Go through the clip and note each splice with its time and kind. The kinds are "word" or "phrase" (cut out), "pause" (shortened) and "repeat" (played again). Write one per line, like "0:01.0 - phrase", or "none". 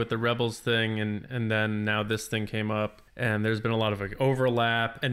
0:03.1 - pause